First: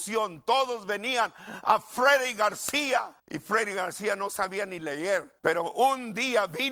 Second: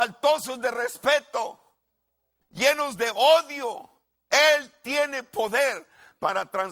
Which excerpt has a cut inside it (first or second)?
first